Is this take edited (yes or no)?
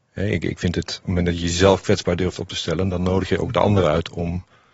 no